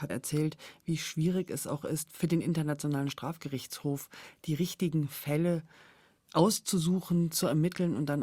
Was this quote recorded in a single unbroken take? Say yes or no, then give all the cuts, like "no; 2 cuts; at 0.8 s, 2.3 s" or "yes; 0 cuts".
yes; 0 cuts